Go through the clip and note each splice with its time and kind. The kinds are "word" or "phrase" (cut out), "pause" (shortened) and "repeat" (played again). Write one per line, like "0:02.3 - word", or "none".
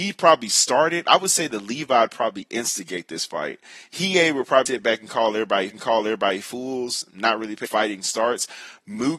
0:04.7 - word
0:05.7 - repeat
0:07.6 - phrase